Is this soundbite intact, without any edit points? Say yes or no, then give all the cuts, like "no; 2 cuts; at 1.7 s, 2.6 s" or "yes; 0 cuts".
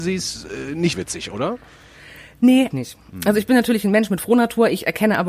no; 2 cuts; at 0.9 s, 2.7 s